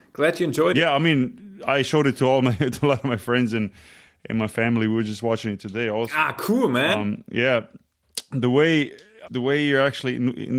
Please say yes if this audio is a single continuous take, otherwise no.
no